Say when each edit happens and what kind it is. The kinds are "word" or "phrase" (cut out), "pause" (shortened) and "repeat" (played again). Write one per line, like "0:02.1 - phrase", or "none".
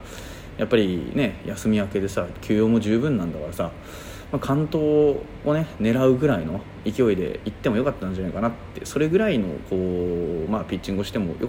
none